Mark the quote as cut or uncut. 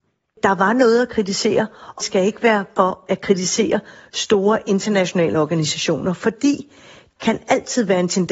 cut